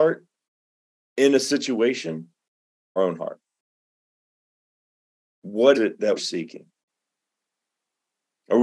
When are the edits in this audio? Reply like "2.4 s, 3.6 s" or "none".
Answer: 3.0 s, 5.7 s, 6.2 s